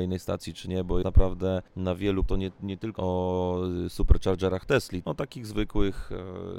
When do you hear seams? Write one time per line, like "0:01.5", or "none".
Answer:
0:01.0
0:01.7
0:02.3
0:03.0
0:05.0